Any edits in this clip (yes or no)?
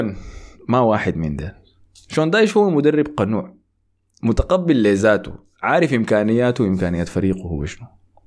no